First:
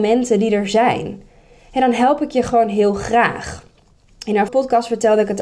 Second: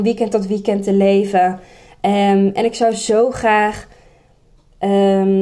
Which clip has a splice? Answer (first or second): first